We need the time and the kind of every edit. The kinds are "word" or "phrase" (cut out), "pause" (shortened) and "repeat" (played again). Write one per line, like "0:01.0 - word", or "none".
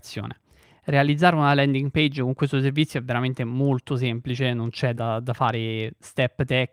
0:05.0 - word

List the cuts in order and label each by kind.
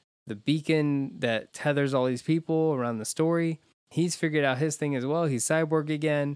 0:01.5 - word
0:03.9 - word

